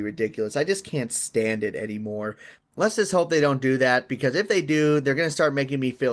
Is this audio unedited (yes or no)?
yes